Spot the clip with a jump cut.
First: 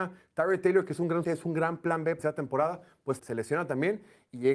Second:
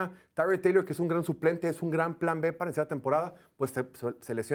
first; 3 cuts; at 1.2 s, 2.2 s, 3.2 s

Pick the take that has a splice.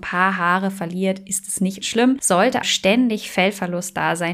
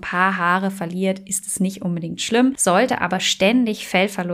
first; 2 cuts; at 1.8 s, 2.6 s

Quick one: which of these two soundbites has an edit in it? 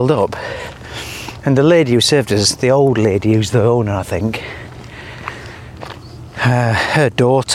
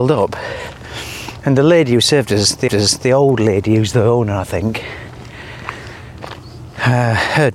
second; 1 cut; at 2.7 s

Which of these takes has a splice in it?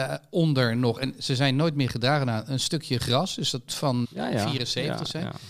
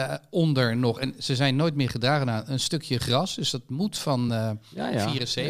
first; 2 cuts; at 3.7 s, 4.0 s

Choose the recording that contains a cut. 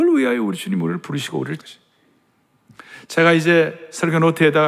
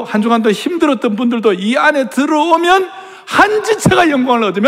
first; 1 cut; at 1.6 s

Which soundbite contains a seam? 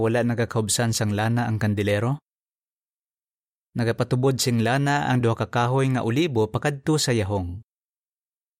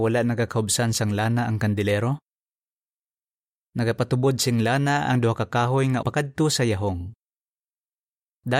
second; 1 cut; at 6.0 s

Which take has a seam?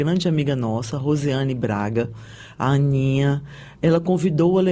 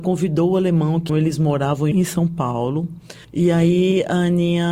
second; 3 cuts; at 1.1 s, 1.9 s, 3.2 s

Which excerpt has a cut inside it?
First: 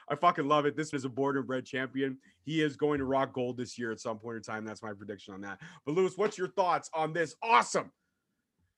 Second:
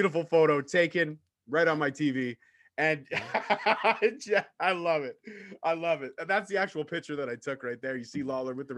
first; 1 cut; at 0.9 s

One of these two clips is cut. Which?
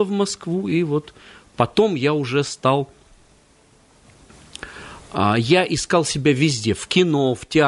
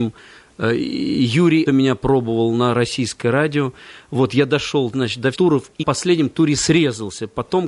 second; 3 cuts; at 1.7 s, 5.3 s, 5.8 s

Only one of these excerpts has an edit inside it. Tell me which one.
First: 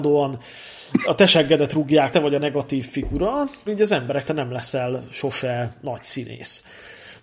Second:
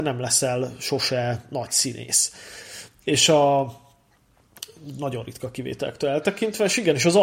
first; 4 cuts; at 1.0 s, 2.1 s, 3.7 s, 4.2 s

